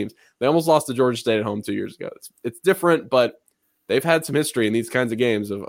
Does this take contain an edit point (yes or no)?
no